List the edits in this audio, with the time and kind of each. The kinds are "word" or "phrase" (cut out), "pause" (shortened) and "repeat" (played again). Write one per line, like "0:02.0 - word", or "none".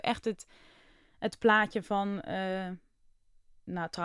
none